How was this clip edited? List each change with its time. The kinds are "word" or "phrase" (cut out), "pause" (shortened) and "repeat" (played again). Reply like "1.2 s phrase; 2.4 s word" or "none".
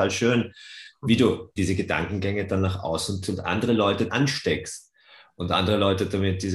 1.6 s word; 3.2 s word; 4.1 s word